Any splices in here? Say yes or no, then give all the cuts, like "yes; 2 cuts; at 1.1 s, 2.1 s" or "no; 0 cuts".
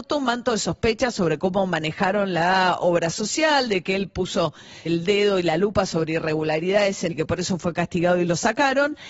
yes; 2 cuts; at 4.9 s, 7.1 s